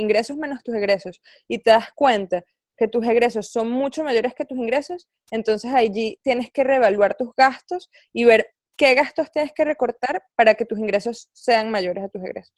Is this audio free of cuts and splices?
yes; 0 cuts

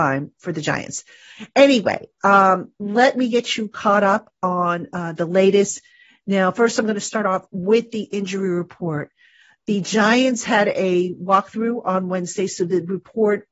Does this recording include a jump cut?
no; 0 cuts

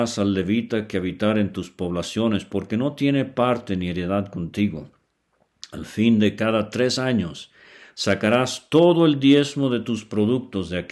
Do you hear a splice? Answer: no; 0 cuts

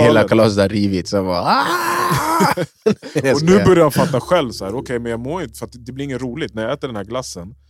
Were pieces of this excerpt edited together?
no; 0 cuts

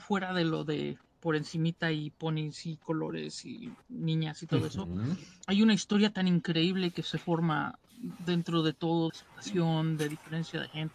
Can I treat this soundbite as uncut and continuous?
no; 3 cuts; at 3.8 s, 5.4 s, 9.1 s

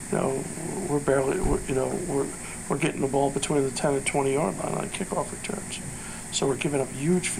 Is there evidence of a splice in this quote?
no; 0 cuts

